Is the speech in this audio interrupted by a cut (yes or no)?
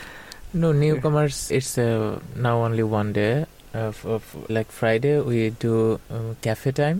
yes